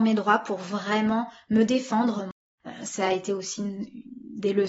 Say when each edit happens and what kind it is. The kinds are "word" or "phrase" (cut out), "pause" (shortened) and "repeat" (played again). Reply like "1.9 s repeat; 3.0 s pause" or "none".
none